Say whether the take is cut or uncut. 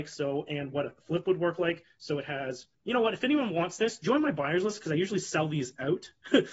cut